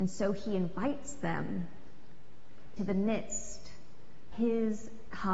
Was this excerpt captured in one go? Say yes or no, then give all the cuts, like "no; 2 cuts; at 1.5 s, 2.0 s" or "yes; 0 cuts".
no; 2 cuts; at 2.8 s, 4.3 s